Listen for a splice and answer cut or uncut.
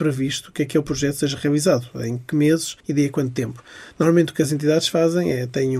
cut